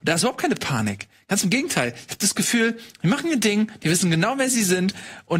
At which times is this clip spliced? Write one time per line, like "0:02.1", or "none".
none